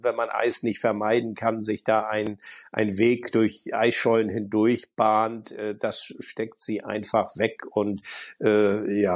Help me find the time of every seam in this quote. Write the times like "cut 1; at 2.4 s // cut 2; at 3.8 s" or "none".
none